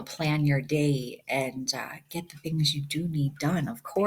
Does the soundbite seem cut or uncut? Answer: uncut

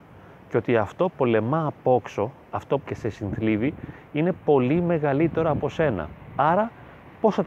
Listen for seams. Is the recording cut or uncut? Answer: cut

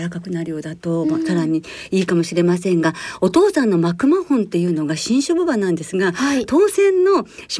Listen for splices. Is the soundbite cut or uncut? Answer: uncut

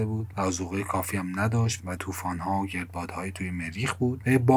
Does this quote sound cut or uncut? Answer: cut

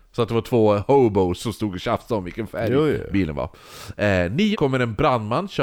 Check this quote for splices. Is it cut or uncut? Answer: cut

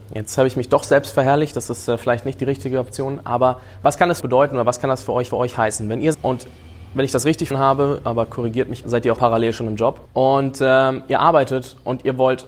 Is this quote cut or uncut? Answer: cut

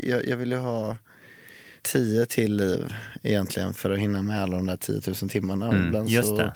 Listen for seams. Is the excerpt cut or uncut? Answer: cut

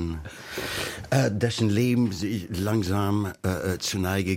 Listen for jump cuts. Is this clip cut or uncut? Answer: uncut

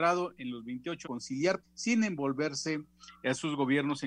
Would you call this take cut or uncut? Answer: cut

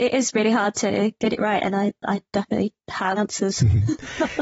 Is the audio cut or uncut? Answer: cut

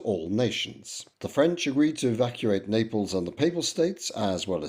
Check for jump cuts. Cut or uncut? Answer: cut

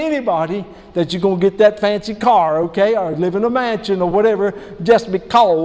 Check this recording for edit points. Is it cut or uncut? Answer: uncut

